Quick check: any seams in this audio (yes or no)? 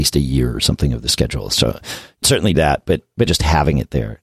yes